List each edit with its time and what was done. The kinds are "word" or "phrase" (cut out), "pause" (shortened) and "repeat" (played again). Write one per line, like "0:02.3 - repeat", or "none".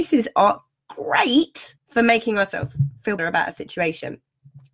0:01.8 - pause
0:03.2 - word

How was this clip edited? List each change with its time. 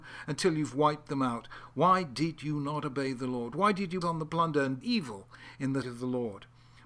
0:04.0 - word
0:04.8 - word
0:05.8 - word

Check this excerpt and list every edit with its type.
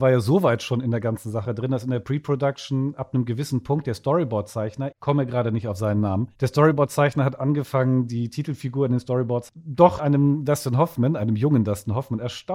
0:04.9 - word
0:06.3 - pause
0:09.5 - word
0:10.0 - word

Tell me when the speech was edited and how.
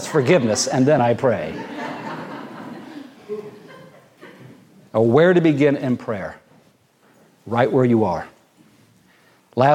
none

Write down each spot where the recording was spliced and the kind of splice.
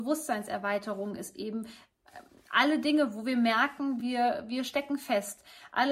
none

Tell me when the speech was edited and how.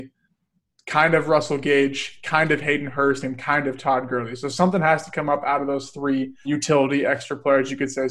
0:06.4 - word

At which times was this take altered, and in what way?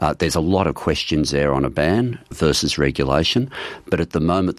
0:02.3 - word

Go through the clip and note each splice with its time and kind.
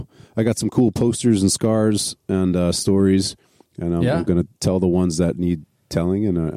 0:04.5 - pause

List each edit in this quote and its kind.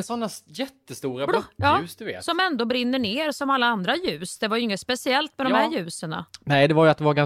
none

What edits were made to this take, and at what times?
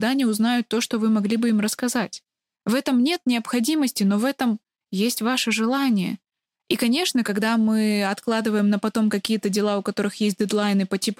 none

